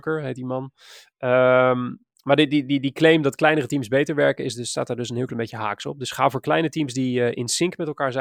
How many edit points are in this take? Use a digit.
0